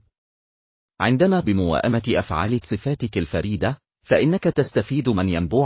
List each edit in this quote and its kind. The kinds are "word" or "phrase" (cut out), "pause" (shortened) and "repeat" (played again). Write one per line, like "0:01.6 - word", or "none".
0:01.4 - word
0:02.6 - word